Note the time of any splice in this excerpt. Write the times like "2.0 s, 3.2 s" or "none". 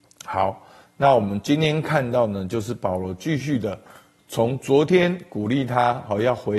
none